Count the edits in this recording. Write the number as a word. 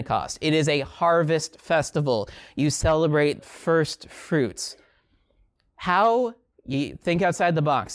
two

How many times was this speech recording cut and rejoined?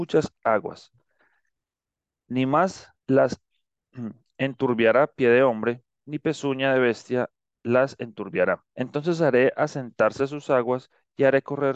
two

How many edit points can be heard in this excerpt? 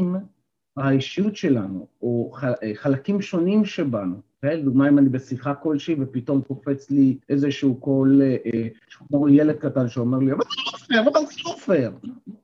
two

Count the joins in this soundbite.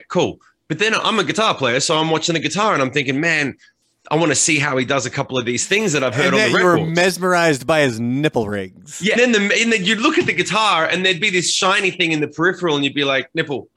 one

